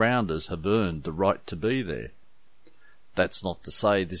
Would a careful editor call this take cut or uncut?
uncut